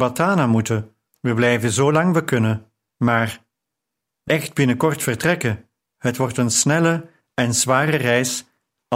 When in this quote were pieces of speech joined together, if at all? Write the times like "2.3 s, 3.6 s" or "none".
1.1 s, 2.9 s, 4.3 s, 5.8 s